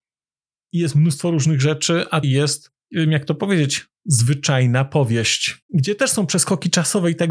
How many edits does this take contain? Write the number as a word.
four